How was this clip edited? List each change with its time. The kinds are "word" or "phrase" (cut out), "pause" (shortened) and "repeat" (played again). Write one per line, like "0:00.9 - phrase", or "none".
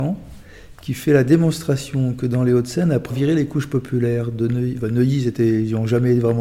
0:03.1 - word